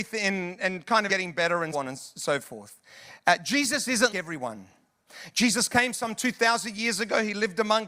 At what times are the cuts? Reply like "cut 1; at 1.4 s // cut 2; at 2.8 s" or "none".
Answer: cut 1; at 1.1 s // cut 2; at 1.7 s // cut 3; at 4.1 s